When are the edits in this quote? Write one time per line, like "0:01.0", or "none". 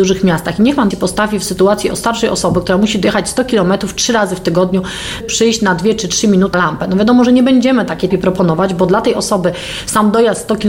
0:00.9
0:05.2
0:06.5
0:08.1

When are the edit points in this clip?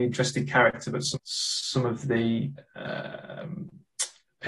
0:01.1

